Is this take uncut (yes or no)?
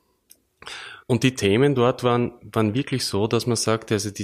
no